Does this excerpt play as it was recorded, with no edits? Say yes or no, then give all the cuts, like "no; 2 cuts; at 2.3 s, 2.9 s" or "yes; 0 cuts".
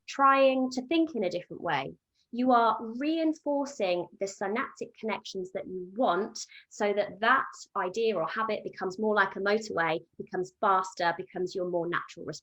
yes; 0 cuts